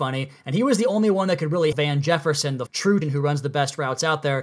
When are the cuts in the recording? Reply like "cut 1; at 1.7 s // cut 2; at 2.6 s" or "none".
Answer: cut 1; at 1.7 s // cut 2; at 2.7 s // cut 3; at 3.0 s

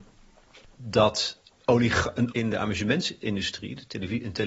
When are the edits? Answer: cut 1; at 2.3 s

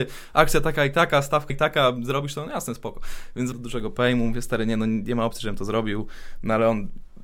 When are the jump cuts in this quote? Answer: cut 1; at 1.5 s // cut 2; at 3.5 s

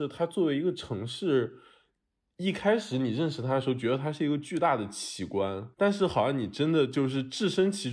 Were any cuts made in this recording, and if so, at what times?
cut 1; at 5.7 s

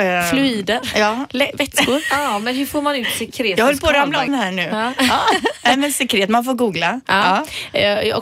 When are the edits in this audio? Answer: cut 1; at 4.3 s

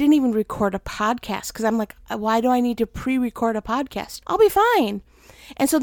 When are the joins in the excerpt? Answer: cut 1; at 4.2 s

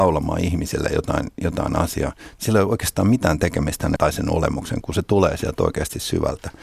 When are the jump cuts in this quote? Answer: cut 1; at 4.0 s // cut 2; at 4.8 s

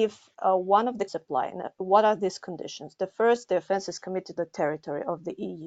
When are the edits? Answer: cut 1; at 1.1 s // cut 2; at 4.4 s

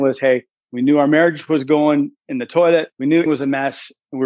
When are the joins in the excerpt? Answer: cut 1; at 2.9 s // cut 2; at 3.3 s

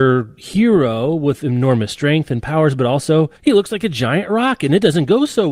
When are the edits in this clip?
cut 1; at 3.4 s

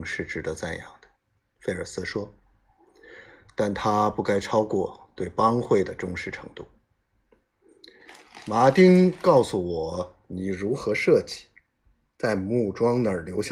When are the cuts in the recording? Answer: cut 1; at 1.2 s

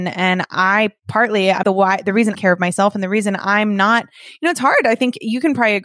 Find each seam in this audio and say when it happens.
cut 1; at 1.6 s // cut 2; at 2.3 s

